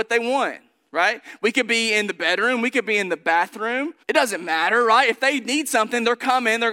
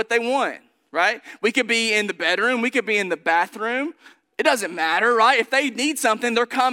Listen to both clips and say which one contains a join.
first; 1 cut; at 4.0 s

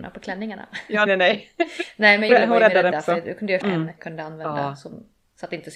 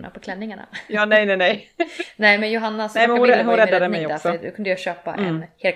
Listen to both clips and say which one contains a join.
first; 5 cuts; at 1.1 s, 2.3 s, 2.9 s, 3.6 s, 4.0 s

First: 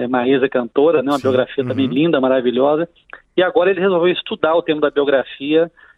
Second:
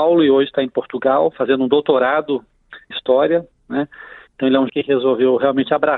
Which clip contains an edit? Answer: second; 2 cuts; at 2.9 s, 4.7 s

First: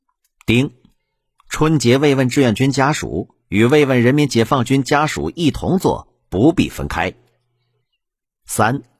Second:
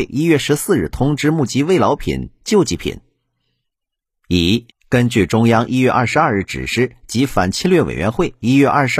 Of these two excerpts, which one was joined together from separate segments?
second; 1 cut; at 4.7 s

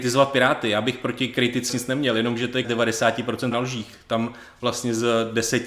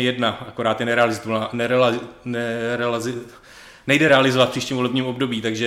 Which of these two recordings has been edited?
first; 3 cuts; at 1.7 s, 2.6 s, 3.5 s

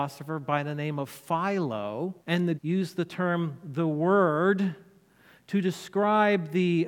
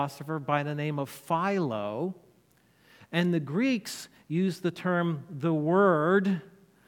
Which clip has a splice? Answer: first; 2 cuts; at 2.2 s, 2.6 s

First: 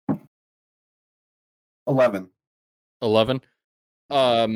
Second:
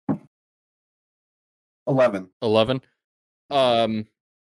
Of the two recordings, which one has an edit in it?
second; 1 cut; at 2.3 s

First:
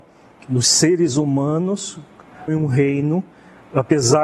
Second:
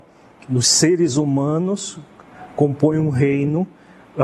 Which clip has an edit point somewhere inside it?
first; 1 cut; at 2.5 s

